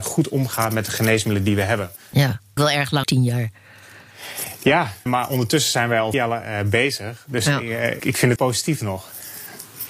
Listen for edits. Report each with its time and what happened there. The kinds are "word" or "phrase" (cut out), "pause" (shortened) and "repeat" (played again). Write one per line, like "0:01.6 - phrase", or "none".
0:02.6 - word
0:03.0 - word
0:05.1 - word
0:06.1 - word
0:08.0 - word
0:08.4 - word

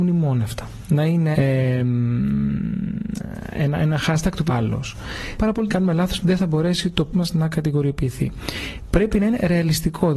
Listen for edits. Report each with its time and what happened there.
0:01.3 - word
0:04.5 - phrase
0:05.4 - phrase
0:05.7 - phrase
0:06.2 - word
0:07.1 - word

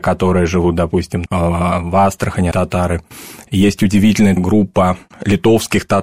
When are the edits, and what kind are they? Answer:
0:01.3 - word
0:02.5 - word
0:04.4 - word

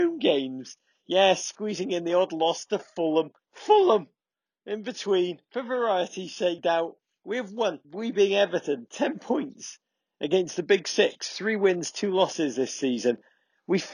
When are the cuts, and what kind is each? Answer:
0:03.4 - pause
0:06.6 - word
0:07.8 - pause

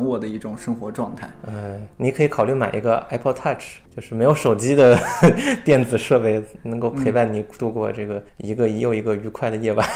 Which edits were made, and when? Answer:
0:01.9 - pause
0:03.9 - pause
0:08.3 - pause

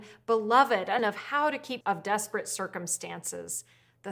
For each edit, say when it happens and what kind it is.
0:01.0 - word
0:01.8 - phrase

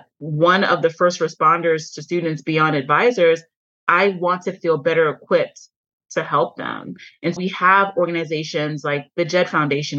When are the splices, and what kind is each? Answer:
0:07.4 - word

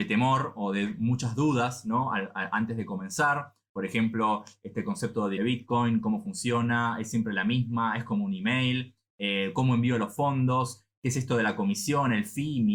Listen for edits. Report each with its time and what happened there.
0:05.4 - word

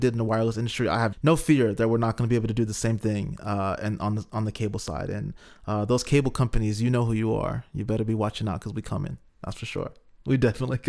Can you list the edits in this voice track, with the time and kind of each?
0:01.1 - word

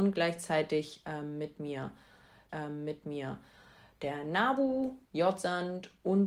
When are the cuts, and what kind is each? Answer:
0:02.5 - repeat
0:05.0 - pause

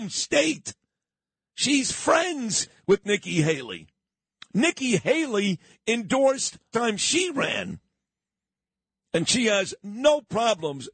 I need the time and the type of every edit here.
0:06.7 - phrase

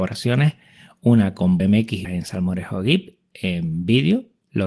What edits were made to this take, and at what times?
0:01.6 - word
0:02.0 - word

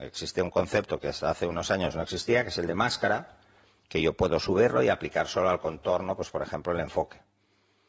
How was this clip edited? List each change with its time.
none

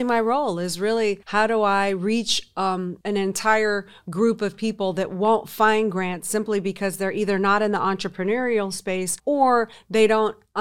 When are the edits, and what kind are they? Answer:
0:01.2 - pause
0:03.0 - pause
0:09.2 - pause

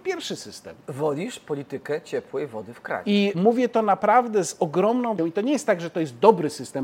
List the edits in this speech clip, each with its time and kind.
0:03.3 - word
0:05.2 - word

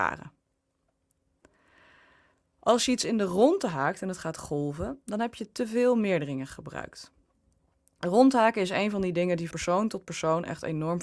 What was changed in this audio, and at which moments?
0:09.5 - word

